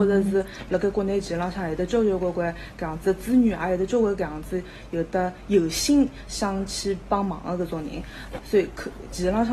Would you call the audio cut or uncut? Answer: cut